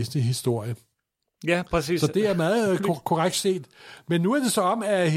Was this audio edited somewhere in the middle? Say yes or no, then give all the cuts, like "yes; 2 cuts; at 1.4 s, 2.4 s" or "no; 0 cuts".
no; 0 cuts